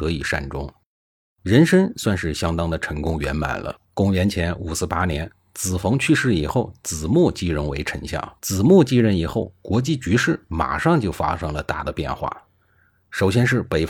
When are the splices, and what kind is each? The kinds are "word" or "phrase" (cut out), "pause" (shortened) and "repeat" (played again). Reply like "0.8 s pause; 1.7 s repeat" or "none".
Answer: 3.8 s pause; 8.4 s pause